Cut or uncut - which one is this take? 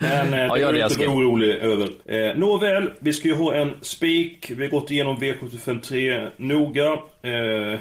cut